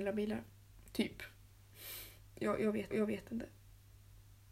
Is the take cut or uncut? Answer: cut